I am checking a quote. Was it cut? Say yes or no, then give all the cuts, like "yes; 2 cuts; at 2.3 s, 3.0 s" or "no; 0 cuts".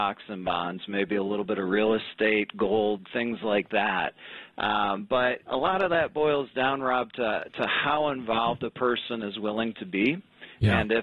yes; 1 cut; at 5.4 s